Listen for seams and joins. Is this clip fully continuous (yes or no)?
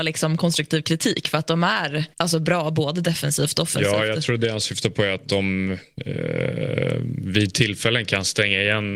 no